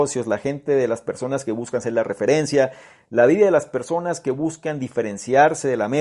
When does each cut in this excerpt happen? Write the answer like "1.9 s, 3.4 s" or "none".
none

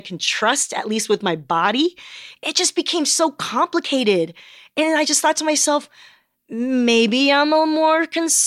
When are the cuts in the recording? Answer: none

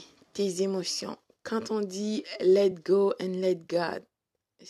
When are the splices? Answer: none

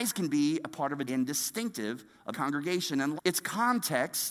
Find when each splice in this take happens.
1.1 s, 2.3 s, 3.2 s

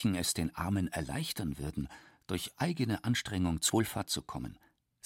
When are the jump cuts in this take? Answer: 3.7 s

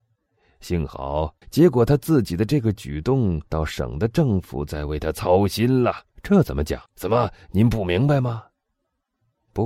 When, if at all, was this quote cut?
1.4 s, 3.5 s, 6.1 s, 6.9 s

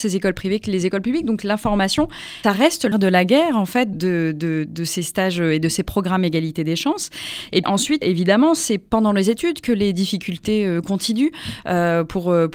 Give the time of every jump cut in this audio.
2.4 s, 2.9 s, 3.9 s, 7.6 s, 8.0 s

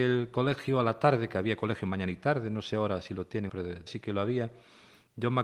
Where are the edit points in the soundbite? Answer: 3.5 s, 3.9 s

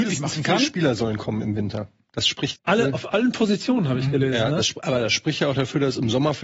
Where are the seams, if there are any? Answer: 2.6 s

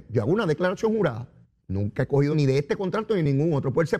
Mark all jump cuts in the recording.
1.4 s, 2.3 s

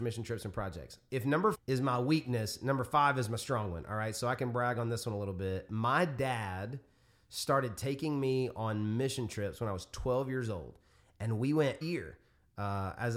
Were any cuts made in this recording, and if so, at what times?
1.5 s, 11.8 s

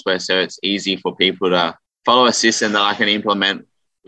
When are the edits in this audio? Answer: 1.9 s

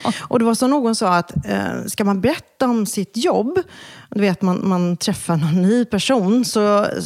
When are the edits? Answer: none

